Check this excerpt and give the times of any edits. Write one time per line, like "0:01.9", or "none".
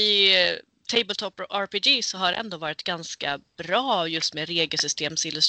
none